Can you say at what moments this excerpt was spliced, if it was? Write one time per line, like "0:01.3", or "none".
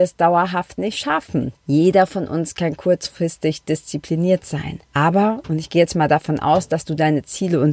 0:01.6
0:04.8